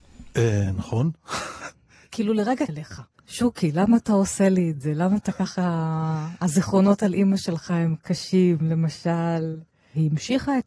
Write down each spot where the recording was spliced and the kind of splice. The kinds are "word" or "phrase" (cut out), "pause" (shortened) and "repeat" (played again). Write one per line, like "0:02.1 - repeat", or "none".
0:02.7 - word
0:03.1 - pause